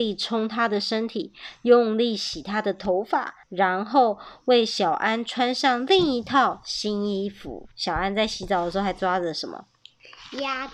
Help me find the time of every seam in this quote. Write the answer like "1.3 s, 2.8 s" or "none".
3.4 s, 7.7 s